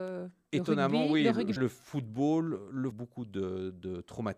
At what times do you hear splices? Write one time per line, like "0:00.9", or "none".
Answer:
0:01.6
0:02.9